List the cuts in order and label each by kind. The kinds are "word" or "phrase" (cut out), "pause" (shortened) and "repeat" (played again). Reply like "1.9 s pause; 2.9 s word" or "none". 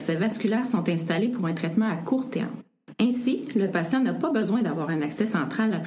none